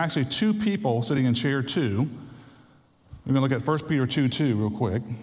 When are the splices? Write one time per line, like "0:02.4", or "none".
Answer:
none